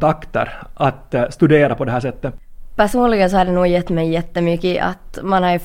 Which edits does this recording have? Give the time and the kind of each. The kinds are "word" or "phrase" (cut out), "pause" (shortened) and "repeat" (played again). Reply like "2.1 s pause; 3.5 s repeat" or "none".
none